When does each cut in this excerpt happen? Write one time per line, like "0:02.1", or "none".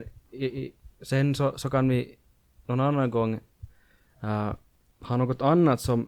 none